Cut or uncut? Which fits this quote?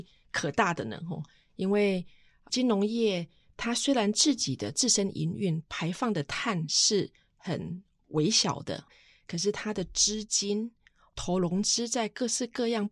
uncut